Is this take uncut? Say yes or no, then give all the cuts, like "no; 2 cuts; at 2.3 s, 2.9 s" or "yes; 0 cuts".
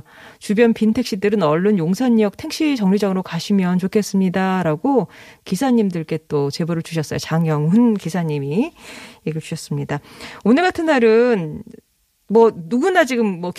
yes; 0 cuts